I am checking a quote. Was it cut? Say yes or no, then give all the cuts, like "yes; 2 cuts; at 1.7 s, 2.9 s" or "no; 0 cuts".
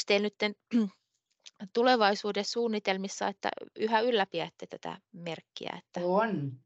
no; 0 cuts